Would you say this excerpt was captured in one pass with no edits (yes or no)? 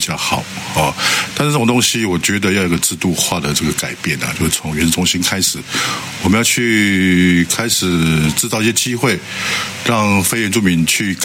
yes